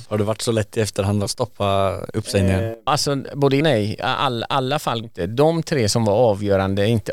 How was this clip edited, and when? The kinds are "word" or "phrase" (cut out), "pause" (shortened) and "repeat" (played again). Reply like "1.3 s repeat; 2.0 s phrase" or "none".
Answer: 1.3 s word; 2.9 s word; 3.6 s word; 5.0 s word